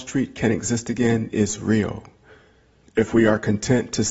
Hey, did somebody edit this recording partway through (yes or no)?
no